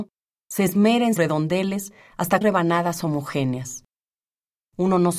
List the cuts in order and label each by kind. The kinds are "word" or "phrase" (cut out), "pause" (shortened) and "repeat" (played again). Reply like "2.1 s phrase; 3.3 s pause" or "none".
1.2 s phrase; 2.4 s word